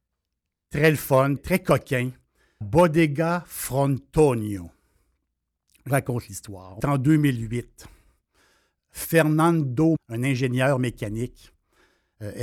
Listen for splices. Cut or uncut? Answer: cut